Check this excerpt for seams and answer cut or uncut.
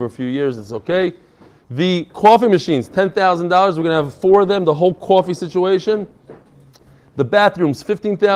uncut